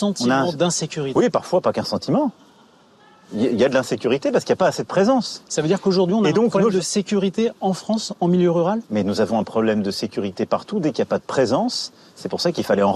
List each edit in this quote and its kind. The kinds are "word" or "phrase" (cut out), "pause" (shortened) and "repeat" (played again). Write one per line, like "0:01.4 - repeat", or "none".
none